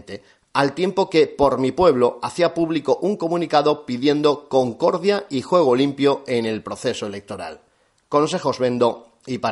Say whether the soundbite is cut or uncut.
uncut